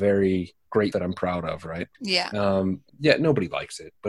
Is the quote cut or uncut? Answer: cut